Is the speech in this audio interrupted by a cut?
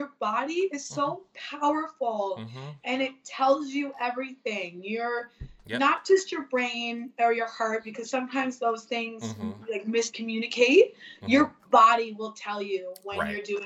no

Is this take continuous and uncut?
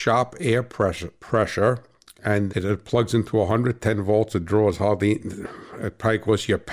no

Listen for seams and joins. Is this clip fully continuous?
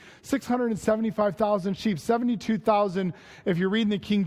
yes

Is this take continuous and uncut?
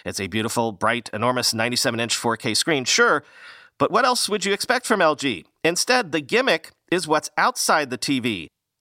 yes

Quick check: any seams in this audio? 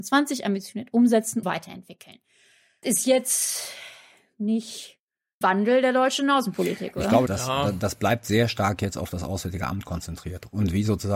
yes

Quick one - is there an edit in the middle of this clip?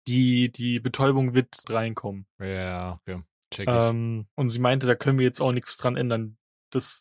yes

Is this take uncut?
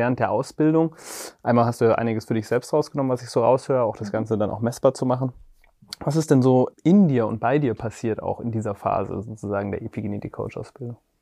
no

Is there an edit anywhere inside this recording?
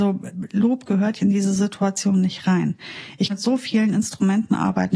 yes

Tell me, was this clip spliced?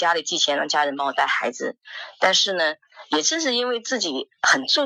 no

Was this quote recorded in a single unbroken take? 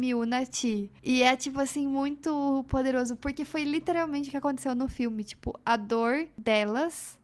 yes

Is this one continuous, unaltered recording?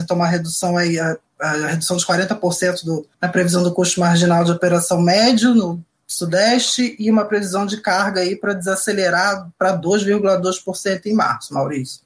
no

